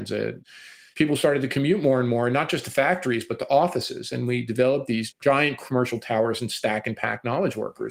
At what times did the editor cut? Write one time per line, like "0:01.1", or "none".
none